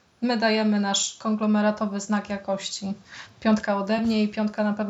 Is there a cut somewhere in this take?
no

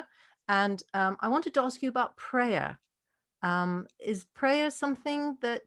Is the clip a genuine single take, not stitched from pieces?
yes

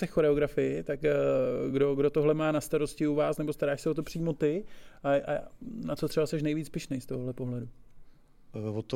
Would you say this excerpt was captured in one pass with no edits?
yes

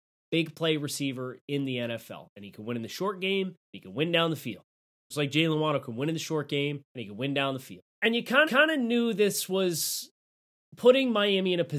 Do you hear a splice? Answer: yes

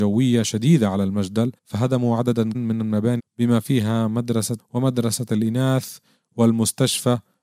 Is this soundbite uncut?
no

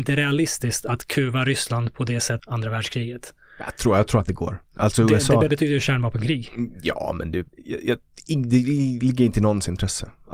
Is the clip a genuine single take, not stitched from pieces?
no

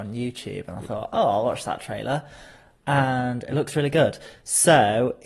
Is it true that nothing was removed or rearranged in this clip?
yes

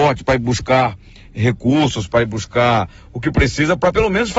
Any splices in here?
no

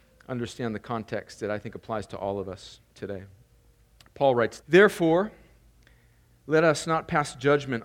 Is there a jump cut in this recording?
yes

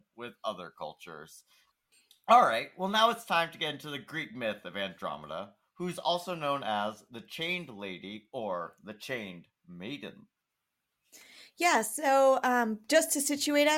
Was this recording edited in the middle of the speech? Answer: no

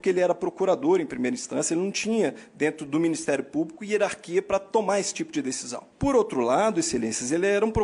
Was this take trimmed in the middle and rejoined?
no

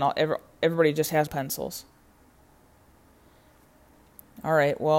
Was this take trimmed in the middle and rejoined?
yes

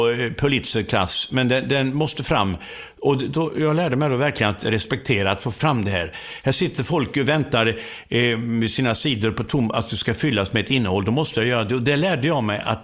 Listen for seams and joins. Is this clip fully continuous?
yes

